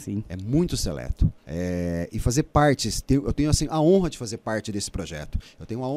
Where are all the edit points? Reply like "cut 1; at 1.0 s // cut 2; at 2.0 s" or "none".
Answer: cut 1; at 1.4 s